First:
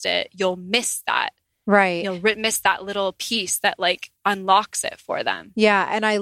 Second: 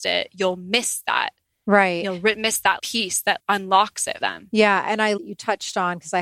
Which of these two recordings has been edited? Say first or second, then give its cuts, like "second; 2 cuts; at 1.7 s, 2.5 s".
second; 4 cuts; at 2.8 s, 3.4 s, 4.2 s, 5.2 s